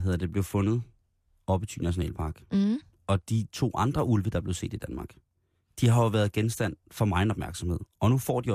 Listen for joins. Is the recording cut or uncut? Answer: uncut